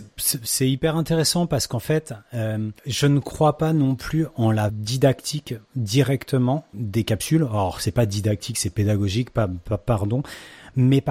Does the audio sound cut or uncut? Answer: cut